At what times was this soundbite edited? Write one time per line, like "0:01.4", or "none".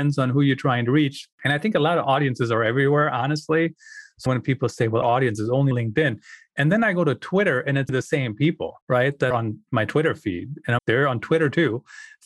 0:01.3
0:04.3
0:05.0
0:05.7
0:07.9
0:08.8
0:09.3
0:10.8

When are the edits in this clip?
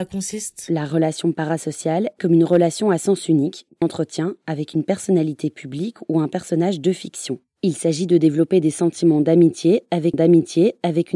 0:02.2
0:03.8
0:10.1

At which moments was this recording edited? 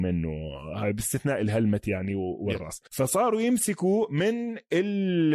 0:02.9

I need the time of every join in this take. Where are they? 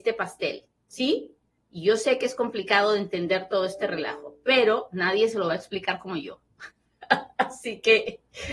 0:01.6
0:06.7

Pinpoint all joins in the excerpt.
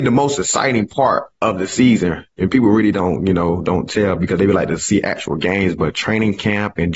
0:01.3

